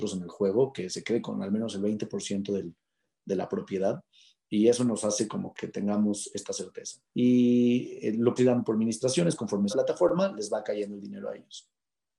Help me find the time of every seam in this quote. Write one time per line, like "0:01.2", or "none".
0:05.5
0:07.1
0:08.4
0:09.7

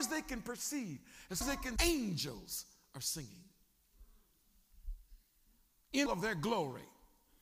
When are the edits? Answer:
0:01.4
0:01.8
0:06.1

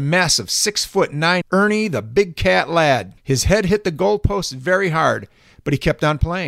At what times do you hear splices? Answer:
0:01.4
0:03.2

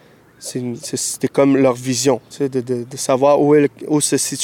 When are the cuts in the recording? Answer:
none

